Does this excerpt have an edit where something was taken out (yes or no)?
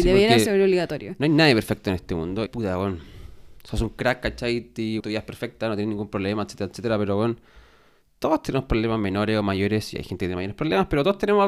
yes